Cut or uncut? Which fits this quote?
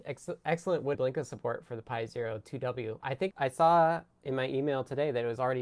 cut